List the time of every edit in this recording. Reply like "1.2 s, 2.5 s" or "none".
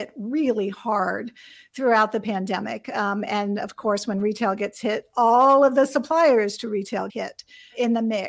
7.1 s